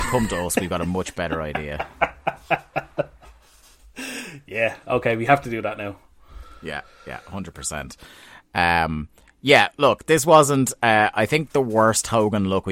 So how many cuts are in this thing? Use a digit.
0